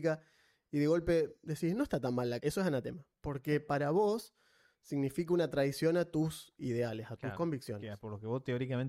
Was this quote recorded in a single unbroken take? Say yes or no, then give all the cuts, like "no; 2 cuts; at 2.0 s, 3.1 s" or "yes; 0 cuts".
no; 1 cut; at 2.4 s